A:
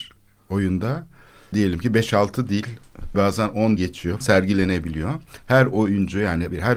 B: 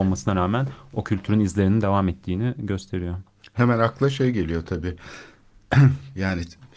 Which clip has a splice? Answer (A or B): A